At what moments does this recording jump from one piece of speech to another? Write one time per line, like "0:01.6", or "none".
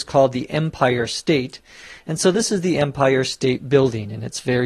none